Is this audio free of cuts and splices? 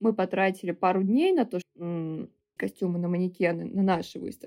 no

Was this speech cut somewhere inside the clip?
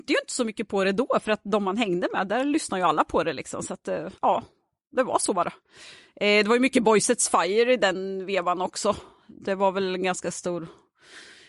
yes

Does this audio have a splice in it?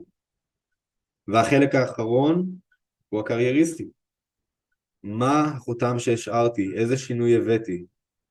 no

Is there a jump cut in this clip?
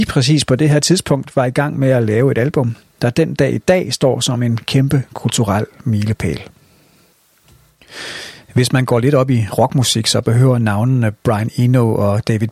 no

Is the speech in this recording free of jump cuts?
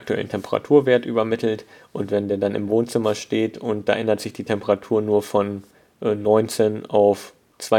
yes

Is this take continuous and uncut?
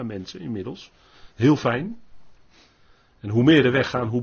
yes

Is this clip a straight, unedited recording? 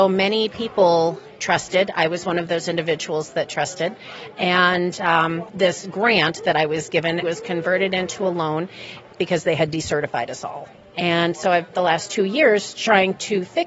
no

